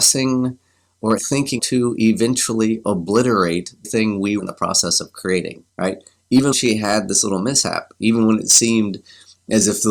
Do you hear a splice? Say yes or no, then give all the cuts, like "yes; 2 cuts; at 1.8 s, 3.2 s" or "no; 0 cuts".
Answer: yes; 6 cuts; at 1.2 s, 1.6 s, 3.8 s, 4.4 s, 5.7 s, 6.5 s